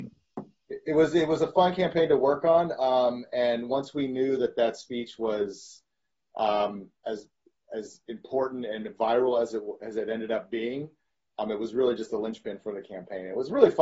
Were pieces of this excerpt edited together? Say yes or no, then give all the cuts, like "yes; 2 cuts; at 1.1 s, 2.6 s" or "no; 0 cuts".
no; 0 cuts